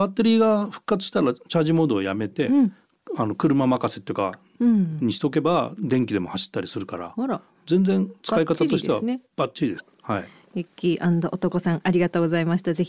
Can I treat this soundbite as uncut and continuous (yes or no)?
no